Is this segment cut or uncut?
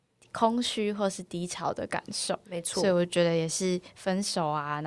cut